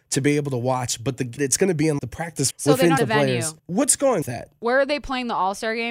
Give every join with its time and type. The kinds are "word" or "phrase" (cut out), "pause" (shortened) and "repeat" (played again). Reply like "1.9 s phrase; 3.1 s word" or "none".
1.4 s word; 2.0 s word; 2.5 s word; 3.0 s word; 3.6 s pause; 4.2 s phrase